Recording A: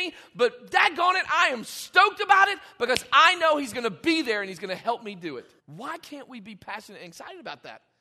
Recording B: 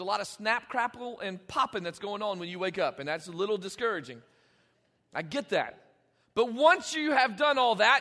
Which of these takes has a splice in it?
A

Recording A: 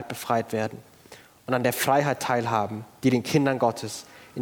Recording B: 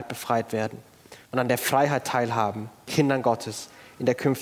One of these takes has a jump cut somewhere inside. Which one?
B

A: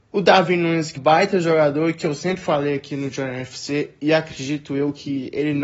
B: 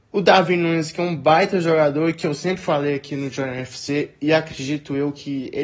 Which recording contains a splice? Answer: A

